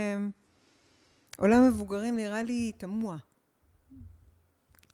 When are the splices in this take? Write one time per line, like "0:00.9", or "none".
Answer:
none

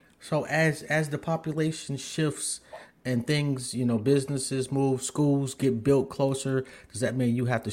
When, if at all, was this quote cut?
none

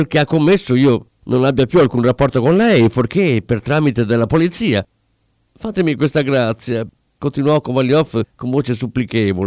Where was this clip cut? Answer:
none

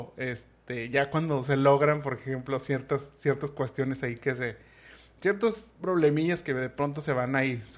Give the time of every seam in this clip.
none

